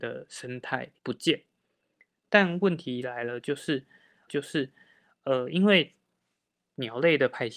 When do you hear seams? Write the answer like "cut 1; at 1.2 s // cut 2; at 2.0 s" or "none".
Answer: cut 1; at 1.0 s // cut 2; at 4.3 s